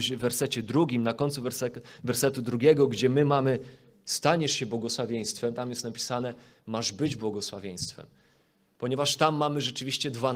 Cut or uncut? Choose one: uncut